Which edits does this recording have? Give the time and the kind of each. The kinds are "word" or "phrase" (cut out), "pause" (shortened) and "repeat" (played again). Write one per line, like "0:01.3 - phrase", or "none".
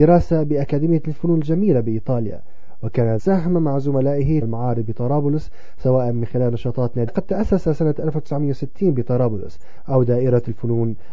0:03.2 - phrase
0:04.4 - phrase
0:07.1 - phrase